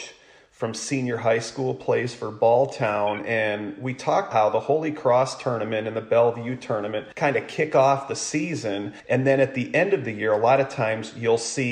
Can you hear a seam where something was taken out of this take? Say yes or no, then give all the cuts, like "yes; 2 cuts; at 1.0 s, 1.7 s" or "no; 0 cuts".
yes; 3 cuts; at 4.3 s, 7.1 s, 9.0 s